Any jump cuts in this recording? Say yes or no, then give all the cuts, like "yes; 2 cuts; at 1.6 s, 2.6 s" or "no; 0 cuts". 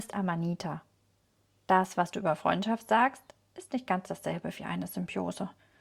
no; 0 cuts